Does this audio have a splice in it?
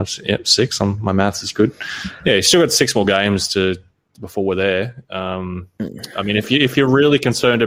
no; 0 cuts

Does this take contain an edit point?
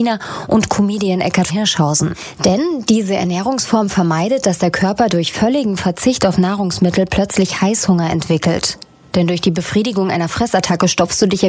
yes; 1 cut; at 1.5 s

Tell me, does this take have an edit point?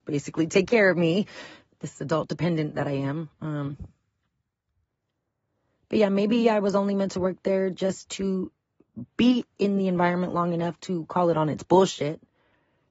no; 0 cuts

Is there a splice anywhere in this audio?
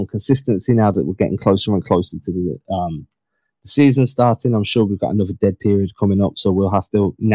no; 0 cuts

